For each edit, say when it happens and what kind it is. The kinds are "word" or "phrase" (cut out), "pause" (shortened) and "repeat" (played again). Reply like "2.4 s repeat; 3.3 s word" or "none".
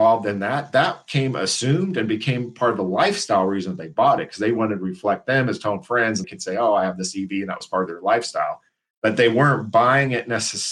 6.2 s word